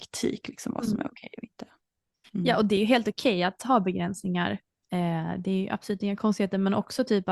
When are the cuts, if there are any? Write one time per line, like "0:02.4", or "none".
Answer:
none

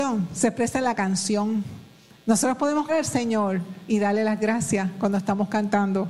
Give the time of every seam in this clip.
0:02.9

